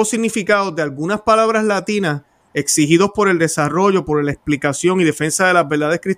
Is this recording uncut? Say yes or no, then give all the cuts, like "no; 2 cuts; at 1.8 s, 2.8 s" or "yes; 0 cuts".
yes; 0 cuts